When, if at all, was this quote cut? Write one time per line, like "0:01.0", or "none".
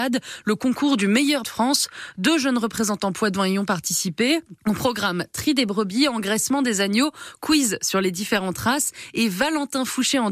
0:01.4
0:04.6